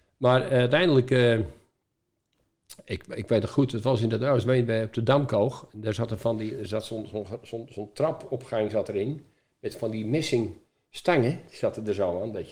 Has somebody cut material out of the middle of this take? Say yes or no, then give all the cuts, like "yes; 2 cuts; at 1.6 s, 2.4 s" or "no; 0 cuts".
no; 0 cuts